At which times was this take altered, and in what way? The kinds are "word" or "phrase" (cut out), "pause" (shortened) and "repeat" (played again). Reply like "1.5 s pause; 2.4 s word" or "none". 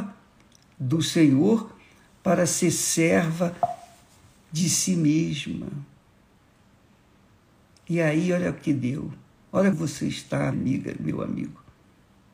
9.7 s word; 10.5 s word